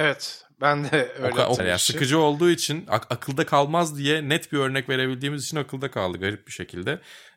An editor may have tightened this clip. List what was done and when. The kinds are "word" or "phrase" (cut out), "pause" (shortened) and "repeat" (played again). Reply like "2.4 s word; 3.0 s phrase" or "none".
1.6 s word

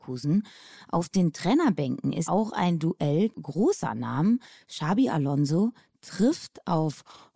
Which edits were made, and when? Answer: 2.3 s phrase; 3.3 s word

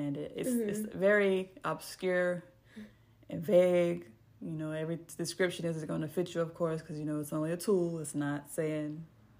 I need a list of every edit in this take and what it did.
none

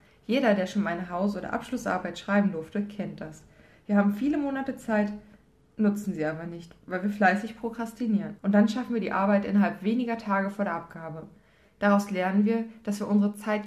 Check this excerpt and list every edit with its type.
8.4 s pause

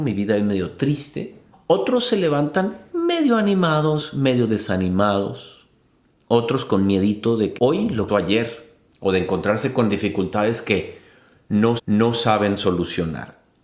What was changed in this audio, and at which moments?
1.5 s pause; 7.6 s word; 8.1 s phrase; 11.8 s repeat

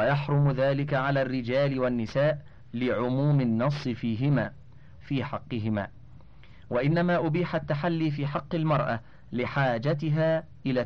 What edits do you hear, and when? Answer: 5.0 s phrase

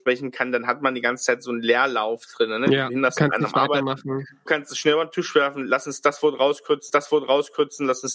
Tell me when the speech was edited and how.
4.5 s word; 6.9 s repeat

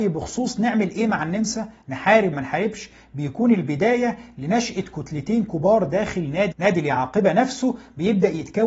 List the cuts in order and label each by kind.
2.3 s word; 6.5 s word

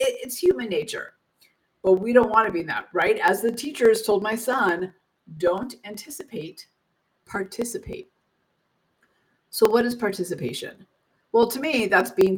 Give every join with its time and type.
none

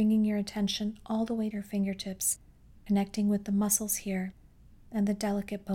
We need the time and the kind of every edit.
1.5 s phrase

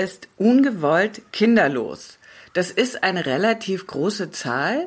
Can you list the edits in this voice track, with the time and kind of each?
none

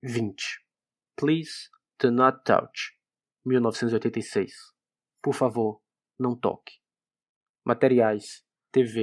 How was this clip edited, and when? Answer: none

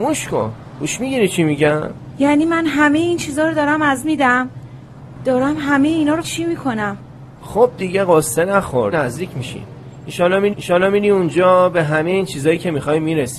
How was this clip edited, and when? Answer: 4.0 s word; 6.2 s word; 8.9 s word; 10.5 s repeat

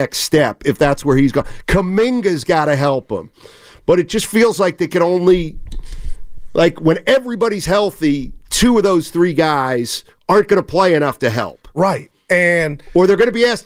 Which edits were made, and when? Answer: none

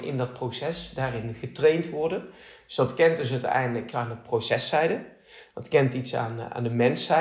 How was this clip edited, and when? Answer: 3.9 s word

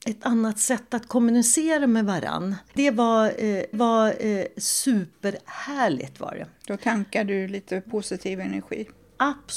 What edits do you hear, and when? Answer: 3.7 s repeat

